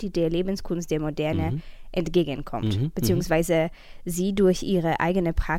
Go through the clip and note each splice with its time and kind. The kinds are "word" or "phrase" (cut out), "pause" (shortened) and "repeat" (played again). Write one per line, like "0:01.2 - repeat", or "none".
none

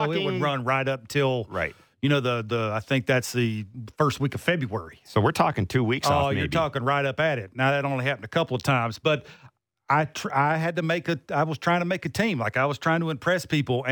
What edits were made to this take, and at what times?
none

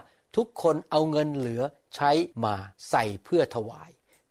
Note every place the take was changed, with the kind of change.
0:02.3 - pause
0:02.8 - pause

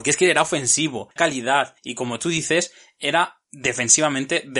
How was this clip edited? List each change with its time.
0:01.2 - word
0:03.4 - pause

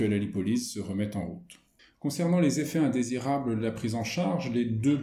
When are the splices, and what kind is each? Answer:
0:01.8 - pause

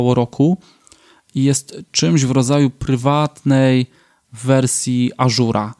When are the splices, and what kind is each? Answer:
none

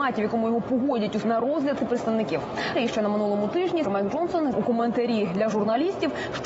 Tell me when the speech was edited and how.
0:01.2 - word
0:01.8 - word
0:02.8 - word
0:03.9 - word
0:04.5 - word

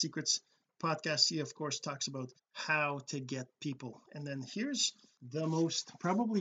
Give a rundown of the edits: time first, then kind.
0:02.4 - pause
0:05.2 - pause

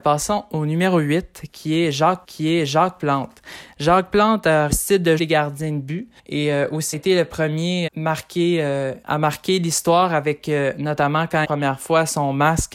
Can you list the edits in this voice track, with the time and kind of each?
0:02.2 - repeat
0:04.7 - phrase
0:05.2 - word
0:06.2 - pause
0:06.9 - word
0:07.9 - phrase
0:09.0 - pause
0:11.4 - phrase

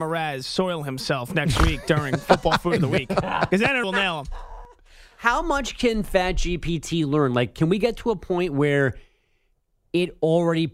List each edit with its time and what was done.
0:03.8 - word

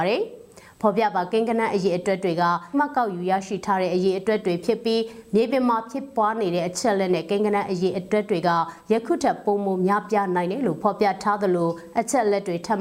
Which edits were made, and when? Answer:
0:02.7 - word

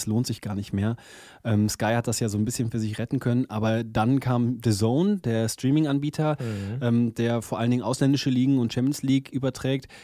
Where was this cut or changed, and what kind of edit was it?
none

